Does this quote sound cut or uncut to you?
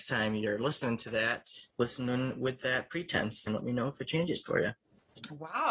cut